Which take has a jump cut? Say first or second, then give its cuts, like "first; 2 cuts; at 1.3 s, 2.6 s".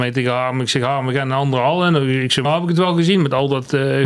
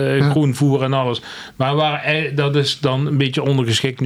first; 1 cut; at 2.4 s